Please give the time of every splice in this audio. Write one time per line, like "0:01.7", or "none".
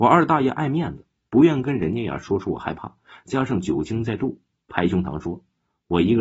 none